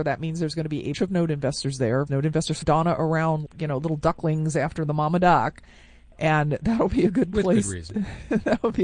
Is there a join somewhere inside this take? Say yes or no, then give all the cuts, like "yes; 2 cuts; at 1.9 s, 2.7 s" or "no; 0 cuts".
yes; 4 cuts; at 0.9 s, 2.1 s, 2.6 s, 3.5 s